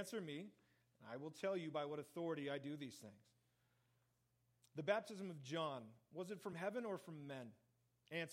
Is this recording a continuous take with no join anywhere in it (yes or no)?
yes